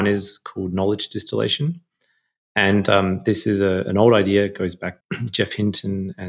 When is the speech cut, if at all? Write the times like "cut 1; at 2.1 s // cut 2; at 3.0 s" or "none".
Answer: cut 1; at 5.0 s